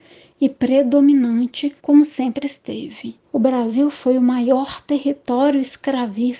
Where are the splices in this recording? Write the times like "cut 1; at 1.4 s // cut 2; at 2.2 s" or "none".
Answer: cut 1; at 1.8 s // cut 2; at 3.3 s